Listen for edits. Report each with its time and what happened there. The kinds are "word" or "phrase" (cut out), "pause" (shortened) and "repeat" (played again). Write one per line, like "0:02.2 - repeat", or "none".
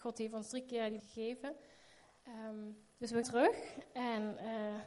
0:01.0 - word
0:03.2 - word